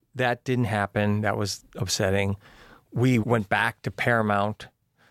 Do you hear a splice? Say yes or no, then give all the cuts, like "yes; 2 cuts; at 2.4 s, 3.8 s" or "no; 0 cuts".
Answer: no; 0 cuts